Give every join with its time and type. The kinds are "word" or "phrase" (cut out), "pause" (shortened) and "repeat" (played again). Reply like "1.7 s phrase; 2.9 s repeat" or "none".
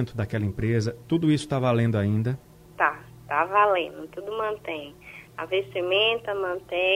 2.5 s pause